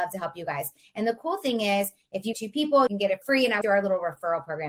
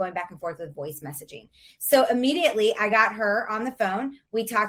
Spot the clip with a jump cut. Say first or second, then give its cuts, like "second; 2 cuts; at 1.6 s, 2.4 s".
first; 4 cuts; at 2.3 s, 2.9 s, 3.2 s, 3.6 s